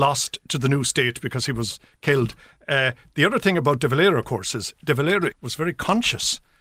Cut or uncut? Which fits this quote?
cut